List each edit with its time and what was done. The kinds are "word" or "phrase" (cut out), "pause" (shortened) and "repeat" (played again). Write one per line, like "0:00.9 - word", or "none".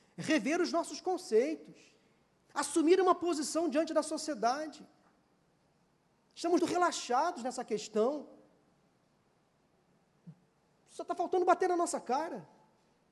0:06.6 - word